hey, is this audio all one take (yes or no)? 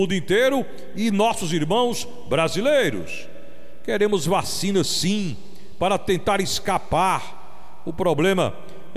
yes